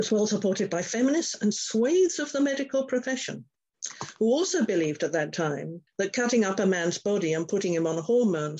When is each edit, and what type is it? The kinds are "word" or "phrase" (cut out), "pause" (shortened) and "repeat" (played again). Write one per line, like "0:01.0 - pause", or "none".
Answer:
0:05.9 - pause